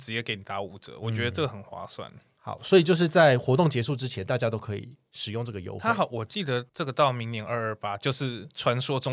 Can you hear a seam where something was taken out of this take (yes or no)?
yes